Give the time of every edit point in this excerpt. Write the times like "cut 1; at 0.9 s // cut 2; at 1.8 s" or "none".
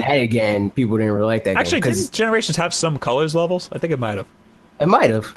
none